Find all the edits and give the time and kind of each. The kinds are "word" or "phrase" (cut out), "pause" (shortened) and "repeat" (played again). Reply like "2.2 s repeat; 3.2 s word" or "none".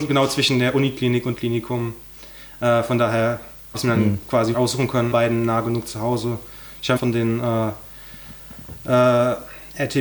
1.4 s phrase; 3.7 s word; 4.5 s word; 5.1 s phrase; 7.0 s phrase

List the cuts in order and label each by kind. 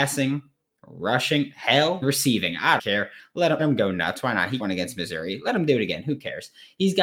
2.0 s word; 2.8 s word; 3.6 s word; 4.6 s word

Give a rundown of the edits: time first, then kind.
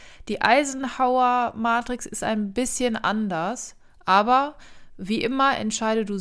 none

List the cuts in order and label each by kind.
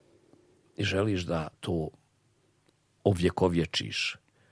1.5 s pause

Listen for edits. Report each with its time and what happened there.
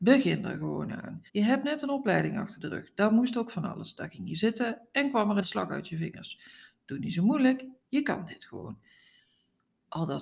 1.3 s pause; 5.4 s word

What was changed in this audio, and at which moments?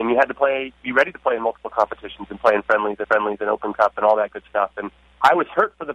3.0 s repeat

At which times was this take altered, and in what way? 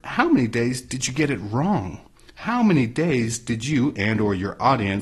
none

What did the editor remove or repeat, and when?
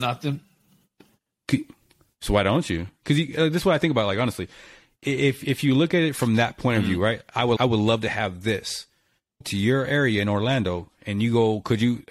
3.0 s pause; 7.6 s word; 9.4 s phrase

